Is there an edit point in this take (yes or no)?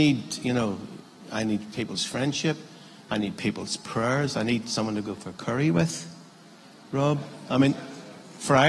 no